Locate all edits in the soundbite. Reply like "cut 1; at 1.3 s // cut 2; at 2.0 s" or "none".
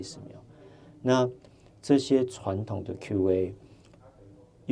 none

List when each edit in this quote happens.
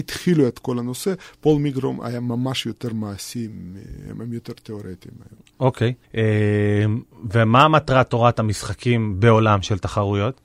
cut 1; at 6.0 s

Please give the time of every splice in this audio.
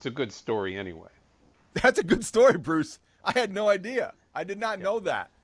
none

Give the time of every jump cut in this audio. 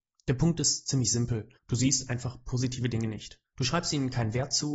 cut 1; at 1.6 s // cut 2; at 3.5 s

